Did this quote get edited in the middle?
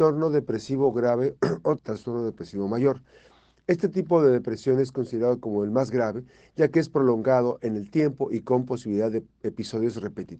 yes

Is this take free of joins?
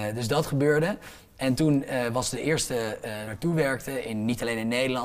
no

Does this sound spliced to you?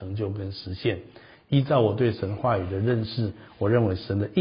no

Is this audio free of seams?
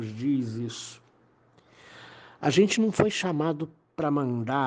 yes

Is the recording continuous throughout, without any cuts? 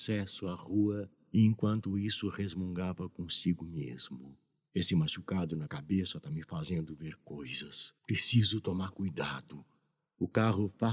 no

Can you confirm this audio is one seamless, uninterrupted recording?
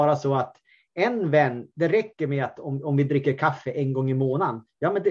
yes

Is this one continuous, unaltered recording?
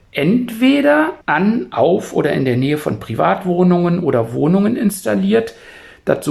no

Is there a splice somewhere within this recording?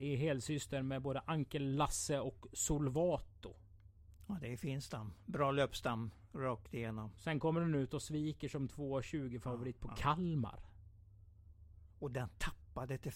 yes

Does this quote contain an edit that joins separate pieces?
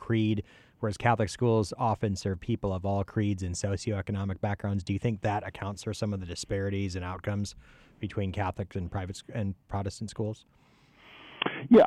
no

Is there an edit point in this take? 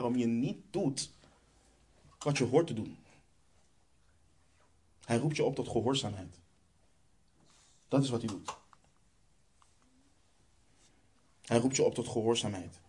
no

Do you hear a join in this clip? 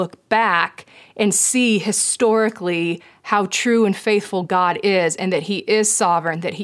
no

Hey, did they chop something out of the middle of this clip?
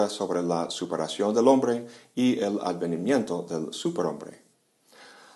no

